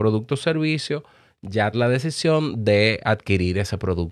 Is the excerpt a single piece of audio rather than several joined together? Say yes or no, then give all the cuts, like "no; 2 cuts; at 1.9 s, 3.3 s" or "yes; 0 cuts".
no; 1 cut; at 1.7 s